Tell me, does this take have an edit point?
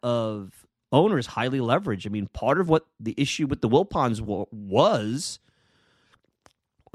no; 0 cuts

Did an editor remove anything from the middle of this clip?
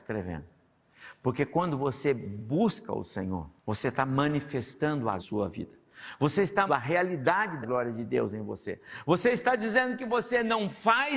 yes; 4 cuts; at 3.6 s, 5.2 s, 6.7 s, 7.6 s

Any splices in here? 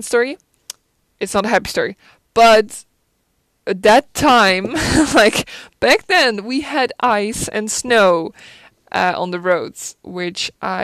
no; 0 cuts

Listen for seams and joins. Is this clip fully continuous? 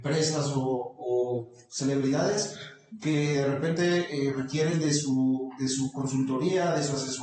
yes; 0 cuts

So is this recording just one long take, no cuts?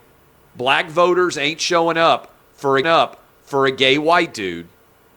no; 1 cut; at 2.8 s

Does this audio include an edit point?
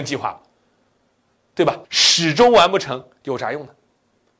yes; 1 cut; at 1.8 s

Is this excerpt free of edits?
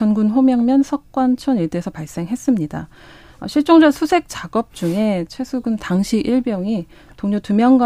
yes; 0 cuts

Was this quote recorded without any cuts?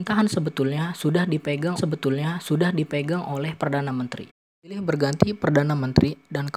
no; 1 cut; at 1.8 s

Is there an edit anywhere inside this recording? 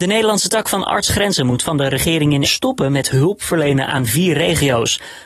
yes; 2 cuts; at 1.1 s, 2.4 s

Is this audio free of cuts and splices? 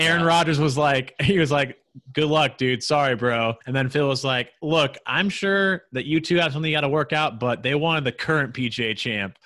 no; 1 cut; at 3.6 s

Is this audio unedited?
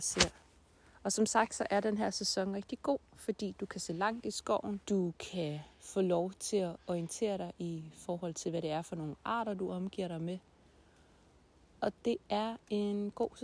no; 1 cut; at 4.8 s

